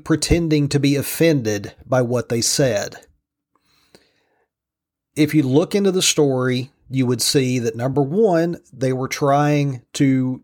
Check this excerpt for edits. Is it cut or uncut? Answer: uncut